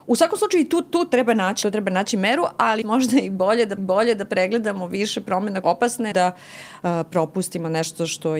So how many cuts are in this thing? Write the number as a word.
five